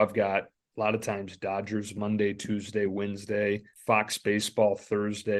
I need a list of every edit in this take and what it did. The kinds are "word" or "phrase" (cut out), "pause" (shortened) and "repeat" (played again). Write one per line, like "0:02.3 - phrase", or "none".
0:03.7 - pause